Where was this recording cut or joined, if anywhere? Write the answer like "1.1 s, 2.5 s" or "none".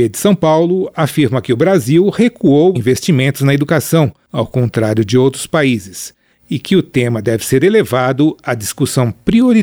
2.8 s